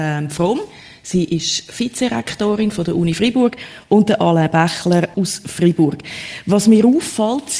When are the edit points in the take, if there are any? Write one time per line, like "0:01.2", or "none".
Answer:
0:05.1